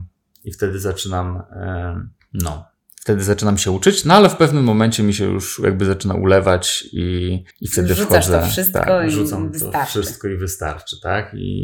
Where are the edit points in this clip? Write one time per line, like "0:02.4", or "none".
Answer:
0:02.2
0:07.5